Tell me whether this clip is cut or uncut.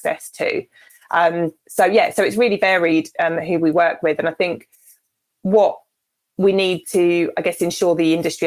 uncut